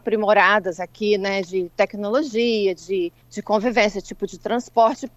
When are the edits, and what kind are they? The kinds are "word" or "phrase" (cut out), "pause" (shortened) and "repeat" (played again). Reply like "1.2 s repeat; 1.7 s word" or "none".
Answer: 3.2 s pause

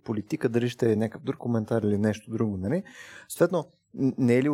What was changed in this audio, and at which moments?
1.4 s word

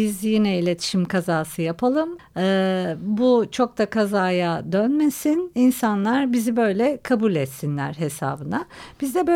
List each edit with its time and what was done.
2.2 s word

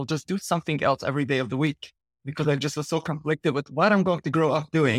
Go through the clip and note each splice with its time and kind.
none

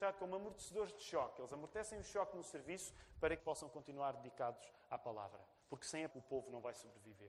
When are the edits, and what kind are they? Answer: 3.4 s phrase; 6.1 s word

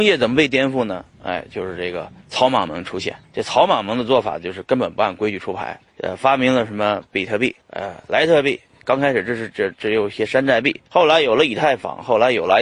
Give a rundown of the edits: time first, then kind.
1.1 s pause; 2.2 s pause; 3.2 s pause; 5.9 s pause; 7.6 s pause; 10.9 s pause

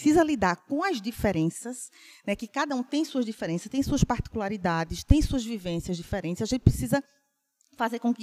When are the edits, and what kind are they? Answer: none

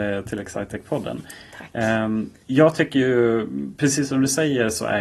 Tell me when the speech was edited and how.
2.4 s pause

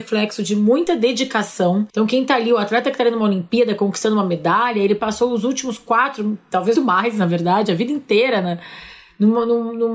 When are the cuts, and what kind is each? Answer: 1.9 s pause; 6.7 s word

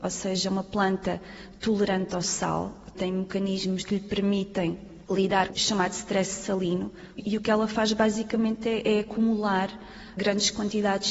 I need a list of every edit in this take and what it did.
5.5 s word

